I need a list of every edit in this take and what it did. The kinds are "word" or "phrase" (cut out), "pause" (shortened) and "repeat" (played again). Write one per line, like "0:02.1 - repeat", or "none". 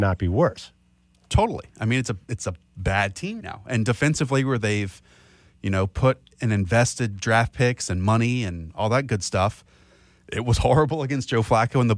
0:03.4 - word